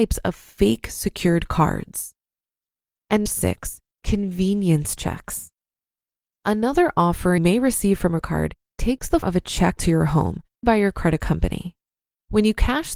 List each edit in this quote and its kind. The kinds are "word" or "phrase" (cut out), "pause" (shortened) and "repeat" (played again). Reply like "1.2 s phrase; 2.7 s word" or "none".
3.3 s word; 7.4 s word; 8.2 s word; 9.2 s word; 9.8 s word; 10.6 s word; 11.2 s word